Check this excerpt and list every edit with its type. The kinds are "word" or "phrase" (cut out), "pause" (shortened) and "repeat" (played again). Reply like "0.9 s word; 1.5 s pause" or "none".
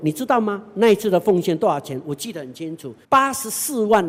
3.0 s pause